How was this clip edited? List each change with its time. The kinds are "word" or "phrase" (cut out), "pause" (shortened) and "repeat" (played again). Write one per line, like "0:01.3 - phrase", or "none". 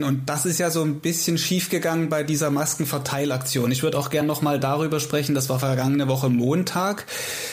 none